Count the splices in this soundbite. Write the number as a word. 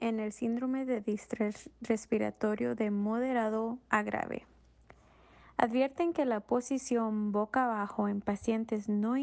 zero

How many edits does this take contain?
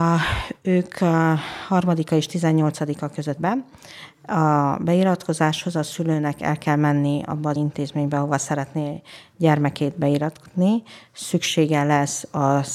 two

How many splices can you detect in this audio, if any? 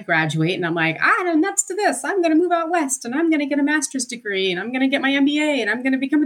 zero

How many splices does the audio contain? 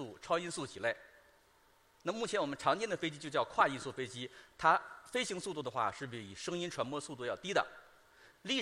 zero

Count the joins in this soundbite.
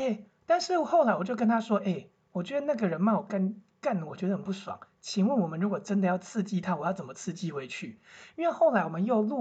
zero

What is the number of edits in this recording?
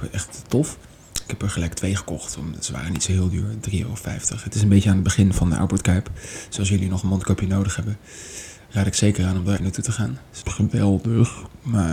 two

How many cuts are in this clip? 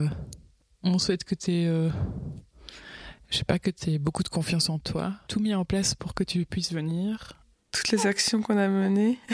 one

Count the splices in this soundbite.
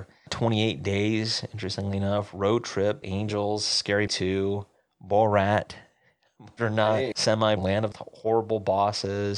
six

